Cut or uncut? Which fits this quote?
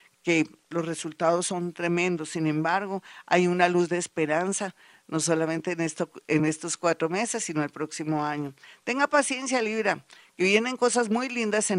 uncut